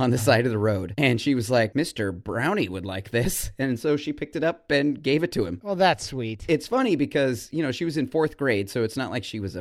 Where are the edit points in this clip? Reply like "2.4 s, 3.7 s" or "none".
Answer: none